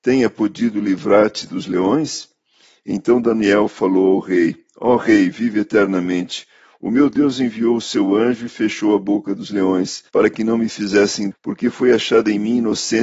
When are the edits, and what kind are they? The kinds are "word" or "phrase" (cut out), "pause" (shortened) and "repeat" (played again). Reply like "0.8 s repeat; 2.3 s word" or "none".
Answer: 10.1 s pause; 11.3 s word